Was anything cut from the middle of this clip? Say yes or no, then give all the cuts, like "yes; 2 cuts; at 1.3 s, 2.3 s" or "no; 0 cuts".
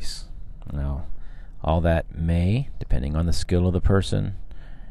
no; 0 cuts